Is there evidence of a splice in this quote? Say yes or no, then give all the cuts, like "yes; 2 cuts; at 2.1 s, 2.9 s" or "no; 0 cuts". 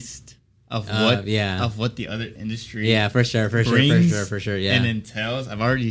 no; 0 cuts